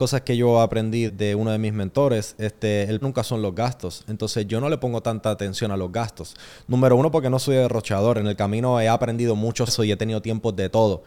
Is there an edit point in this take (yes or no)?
yes